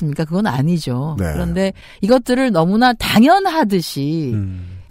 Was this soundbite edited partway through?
no; 0 cuts

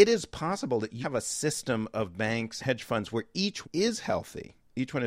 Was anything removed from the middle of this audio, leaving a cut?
yes; 3 cuts; at 1.0 s, 2.6 s, 3.6 s

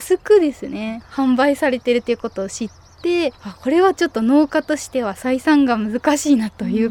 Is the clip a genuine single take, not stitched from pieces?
no; 1 cut; at 3.3 s

